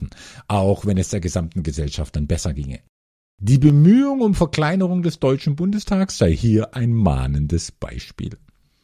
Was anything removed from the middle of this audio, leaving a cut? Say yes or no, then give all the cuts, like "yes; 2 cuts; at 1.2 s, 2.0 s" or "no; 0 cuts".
no; 0 cuts